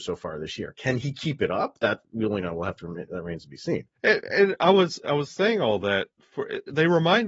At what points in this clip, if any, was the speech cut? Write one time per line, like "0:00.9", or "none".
0:04.0